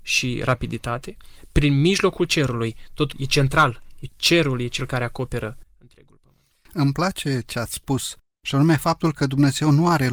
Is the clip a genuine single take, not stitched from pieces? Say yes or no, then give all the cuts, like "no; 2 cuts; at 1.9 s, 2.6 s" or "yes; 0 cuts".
no; 2 cuts; at 3.1 s, 4.1 s